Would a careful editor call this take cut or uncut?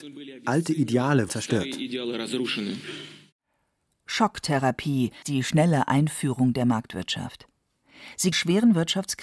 cut